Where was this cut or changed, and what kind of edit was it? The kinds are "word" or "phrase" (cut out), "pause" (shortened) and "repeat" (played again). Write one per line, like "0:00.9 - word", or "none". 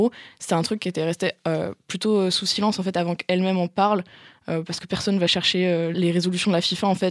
none